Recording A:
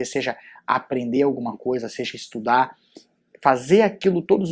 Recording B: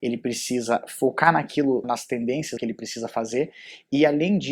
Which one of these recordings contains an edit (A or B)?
B